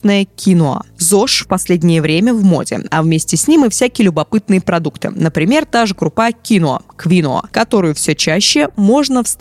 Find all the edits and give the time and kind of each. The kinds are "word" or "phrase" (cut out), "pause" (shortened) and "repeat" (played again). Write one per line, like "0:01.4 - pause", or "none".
none